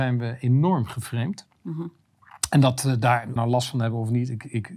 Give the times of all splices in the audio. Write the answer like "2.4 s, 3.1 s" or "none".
3.4 s